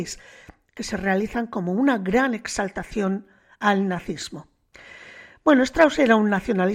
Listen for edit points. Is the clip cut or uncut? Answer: uncut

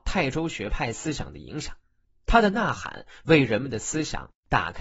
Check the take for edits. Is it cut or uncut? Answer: cut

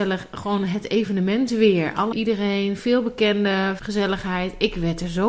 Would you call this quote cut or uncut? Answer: cut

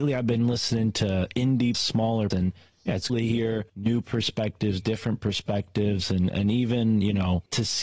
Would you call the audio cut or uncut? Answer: cut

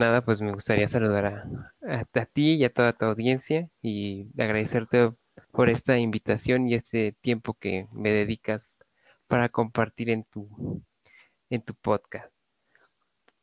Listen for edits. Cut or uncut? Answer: cut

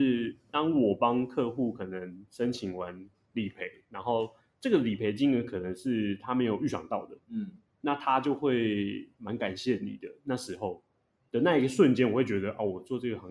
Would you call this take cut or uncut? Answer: uncut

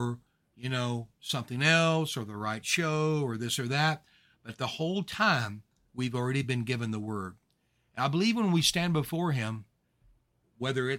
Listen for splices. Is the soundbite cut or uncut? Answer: uncut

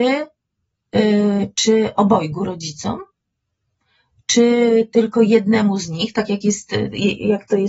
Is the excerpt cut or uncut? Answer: uncut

